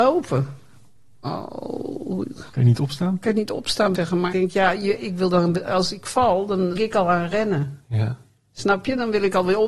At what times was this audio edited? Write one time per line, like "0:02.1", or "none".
0:02.5
0:03.9
0:04.3
0:06.8